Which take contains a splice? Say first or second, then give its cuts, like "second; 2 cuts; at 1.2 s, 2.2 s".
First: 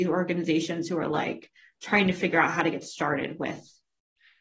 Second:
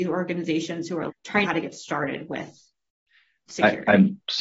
second; 2 cuts; at 1.1 s, 1.5 s